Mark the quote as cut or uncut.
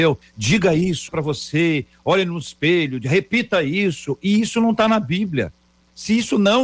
cut